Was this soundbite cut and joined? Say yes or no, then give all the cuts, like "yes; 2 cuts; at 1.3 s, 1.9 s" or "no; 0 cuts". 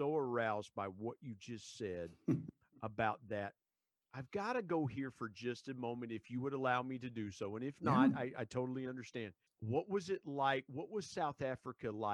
yes; 1 cut; at 9.5 s